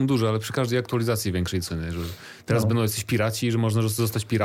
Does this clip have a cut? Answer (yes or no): yes